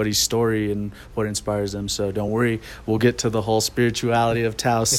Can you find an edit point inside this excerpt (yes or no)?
no